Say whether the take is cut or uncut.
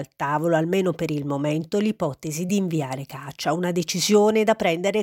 uncut